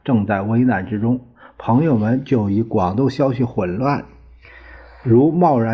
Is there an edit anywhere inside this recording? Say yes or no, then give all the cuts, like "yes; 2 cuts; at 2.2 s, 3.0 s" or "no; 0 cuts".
no; 0 cuts